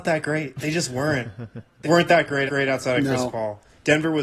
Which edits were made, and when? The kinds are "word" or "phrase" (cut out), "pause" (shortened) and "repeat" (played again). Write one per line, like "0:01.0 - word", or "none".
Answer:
0:01.8 - word
0:02.5 - repeat